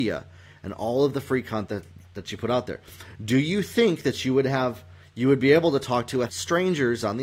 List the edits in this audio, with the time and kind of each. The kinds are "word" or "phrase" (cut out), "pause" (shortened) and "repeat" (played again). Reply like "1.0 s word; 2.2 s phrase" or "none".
6.3 s word